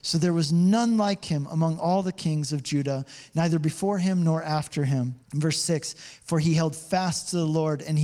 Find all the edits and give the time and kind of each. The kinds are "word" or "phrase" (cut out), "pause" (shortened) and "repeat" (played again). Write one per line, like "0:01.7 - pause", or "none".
0:05.2 - pause